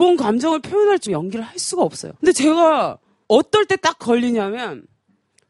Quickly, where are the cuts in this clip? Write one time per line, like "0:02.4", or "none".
0:01.1
0:02.2